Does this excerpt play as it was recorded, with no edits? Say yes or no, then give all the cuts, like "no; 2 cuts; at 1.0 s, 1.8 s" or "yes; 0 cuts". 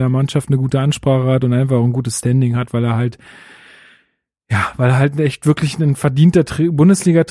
yes; 0 cuts